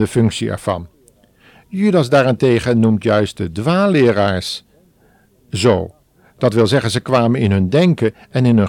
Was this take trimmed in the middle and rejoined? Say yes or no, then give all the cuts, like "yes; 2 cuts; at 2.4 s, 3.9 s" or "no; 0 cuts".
no; 0 cuts